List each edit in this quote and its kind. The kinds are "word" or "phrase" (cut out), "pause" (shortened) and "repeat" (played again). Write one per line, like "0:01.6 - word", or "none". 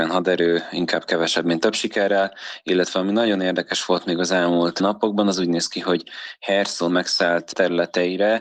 0:06.9 - phrase